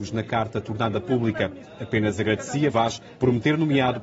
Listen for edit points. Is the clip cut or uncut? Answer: cut